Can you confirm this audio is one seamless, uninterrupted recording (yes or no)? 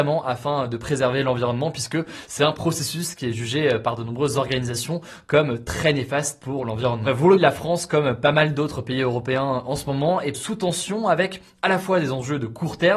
no